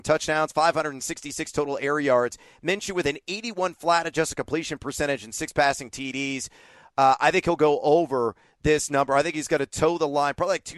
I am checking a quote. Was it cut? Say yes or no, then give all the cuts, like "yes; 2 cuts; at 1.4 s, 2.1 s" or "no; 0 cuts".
no; 0 cuts